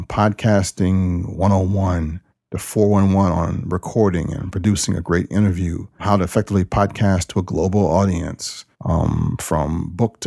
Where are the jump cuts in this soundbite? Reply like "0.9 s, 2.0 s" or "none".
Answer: 2.3 s, 6.0 s, 8.7 s